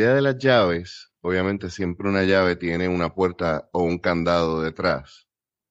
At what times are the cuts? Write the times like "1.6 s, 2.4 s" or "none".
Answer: 1.2 s